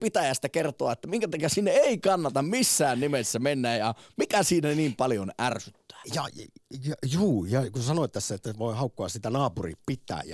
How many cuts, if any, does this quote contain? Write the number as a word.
zero